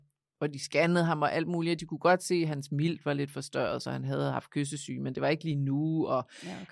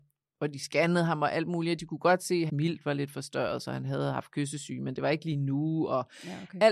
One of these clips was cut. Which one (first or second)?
second